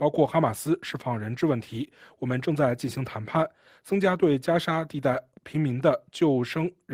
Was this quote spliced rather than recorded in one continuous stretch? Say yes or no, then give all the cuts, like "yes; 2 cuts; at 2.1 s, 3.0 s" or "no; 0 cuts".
no; 0 cuts